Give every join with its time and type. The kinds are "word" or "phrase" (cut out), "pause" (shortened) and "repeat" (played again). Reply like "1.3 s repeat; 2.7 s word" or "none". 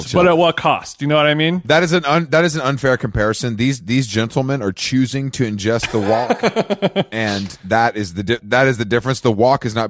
8.4 s word